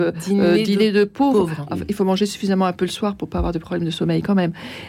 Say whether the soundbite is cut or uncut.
uncut